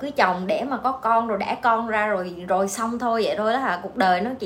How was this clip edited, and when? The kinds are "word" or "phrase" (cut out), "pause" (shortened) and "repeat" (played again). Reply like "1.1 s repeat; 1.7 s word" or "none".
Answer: none